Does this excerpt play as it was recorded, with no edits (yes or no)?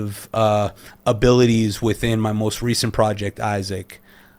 yes